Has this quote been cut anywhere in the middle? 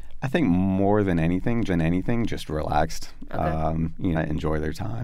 yes; 2 cuts; at 1.7 s, 4.1 s

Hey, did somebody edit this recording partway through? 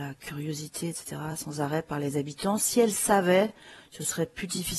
no; 0 cuts

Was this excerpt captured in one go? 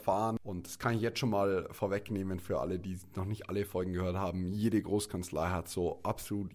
yes; 0 cuts

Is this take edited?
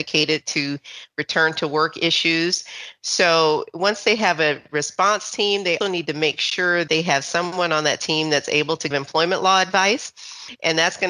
yes; 3 cuts; at 5.8 s, 6.9 s, 8.9 s

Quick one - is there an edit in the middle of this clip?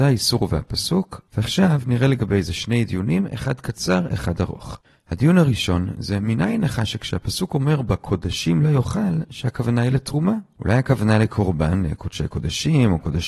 no; 0 cuts

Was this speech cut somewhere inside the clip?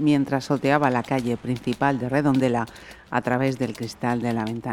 no; 0 cuts

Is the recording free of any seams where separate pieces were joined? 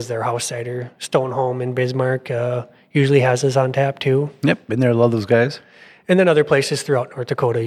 yes; 0 cuts

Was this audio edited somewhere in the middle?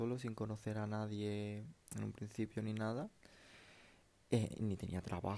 no; 0 cuts

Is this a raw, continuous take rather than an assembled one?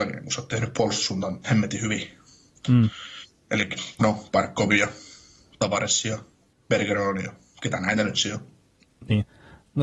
no; 1 cut; at 1.4 s

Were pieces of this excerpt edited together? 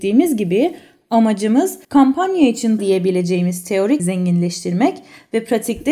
yes; 3 cuts; at 1.8 s, 2.8 s, 4.0 s

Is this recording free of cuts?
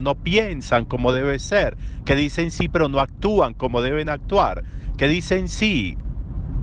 yes; 0 cuts

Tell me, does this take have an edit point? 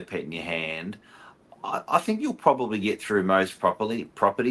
no; 0 cuts

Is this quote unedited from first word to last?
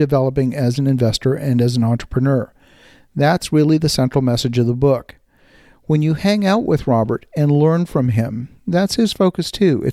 yes; 0 cuts

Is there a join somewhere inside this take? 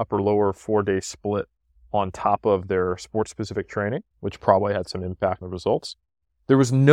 yes; 2 cuts; at 4.1 s, 5.4 s

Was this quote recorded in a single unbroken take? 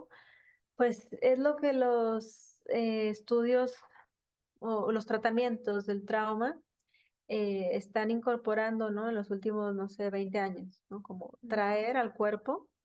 yes; 0 cuts

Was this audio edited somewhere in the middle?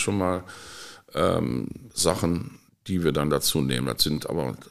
yes; 1 cut; at 2.7 s

